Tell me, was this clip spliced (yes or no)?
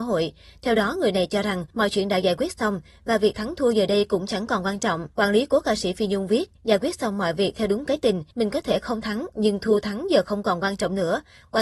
yes